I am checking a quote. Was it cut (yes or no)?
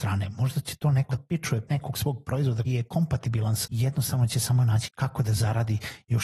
yes